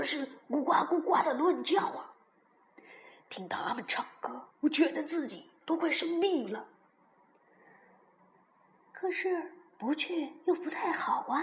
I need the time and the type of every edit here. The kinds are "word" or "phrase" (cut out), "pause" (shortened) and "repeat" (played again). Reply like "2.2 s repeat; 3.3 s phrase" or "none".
4.5 s pause